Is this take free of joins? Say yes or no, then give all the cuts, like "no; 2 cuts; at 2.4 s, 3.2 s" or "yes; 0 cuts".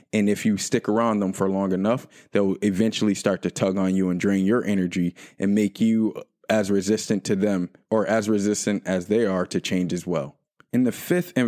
yes; 0 cuts